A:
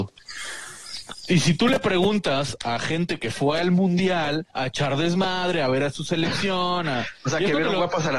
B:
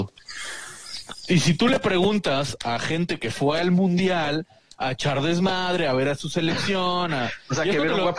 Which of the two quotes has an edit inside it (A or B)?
A